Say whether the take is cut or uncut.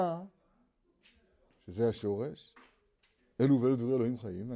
uncut